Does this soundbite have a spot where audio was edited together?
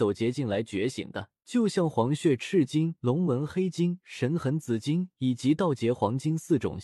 yes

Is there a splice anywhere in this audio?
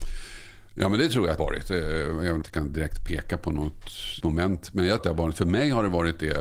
yes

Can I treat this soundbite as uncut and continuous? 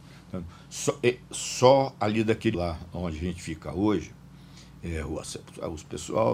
no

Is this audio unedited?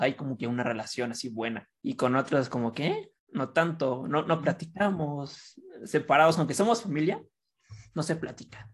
no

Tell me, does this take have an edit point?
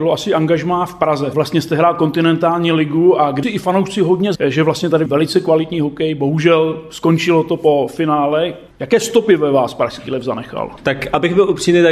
yes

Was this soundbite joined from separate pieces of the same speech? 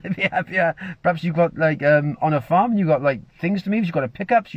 no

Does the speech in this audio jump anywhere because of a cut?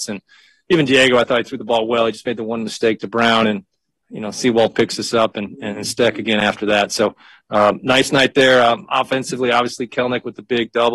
no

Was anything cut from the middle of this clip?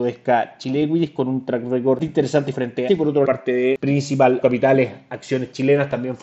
yes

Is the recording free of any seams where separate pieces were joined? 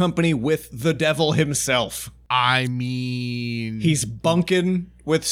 yes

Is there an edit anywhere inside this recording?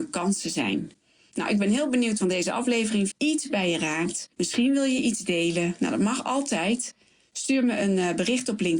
yes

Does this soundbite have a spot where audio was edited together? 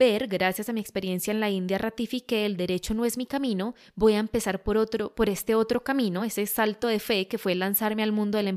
no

